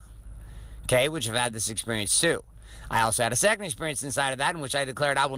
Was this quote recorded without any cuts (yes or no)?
yes